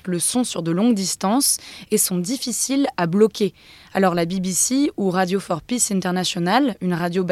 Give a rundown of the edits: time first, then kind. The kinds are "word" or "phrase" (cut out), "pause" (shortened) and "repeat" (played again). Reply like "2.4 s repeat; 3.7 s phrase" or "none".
none

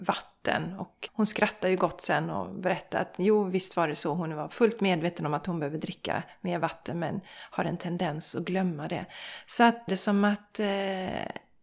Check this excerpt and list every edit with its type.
1.1 s word; 9.9 s phrase

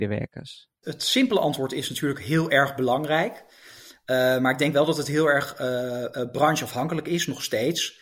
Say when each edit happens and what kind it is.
none

